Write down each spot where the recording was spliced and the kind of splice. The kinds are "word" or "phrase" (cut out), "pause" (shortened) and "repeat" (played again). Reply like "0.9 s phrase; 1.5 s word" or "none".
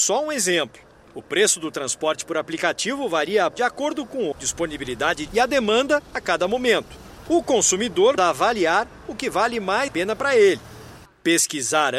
3.5 s word; 4.3 s word; 5.3 s word; 8.2 s word; 9.9 s word